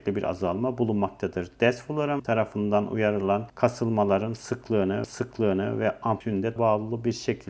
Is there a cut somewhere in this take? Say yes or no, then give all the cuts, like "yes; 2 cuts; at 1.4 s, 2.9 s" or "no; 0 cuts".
yes; 4 cuts; at 2.2 s, 3.5 s, 5.0 s, 6.6 s